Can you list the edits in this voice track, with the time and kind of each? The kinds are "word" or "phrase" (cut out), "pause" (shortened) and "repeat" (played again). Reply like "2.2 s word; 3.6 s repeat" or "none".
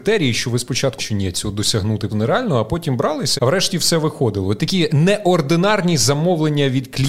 1.0 s word; 2.1 s word; 3.4 s word; 4.6 s word; 4.9 s word